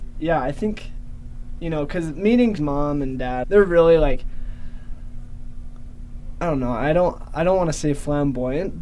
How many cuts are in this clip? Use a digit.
2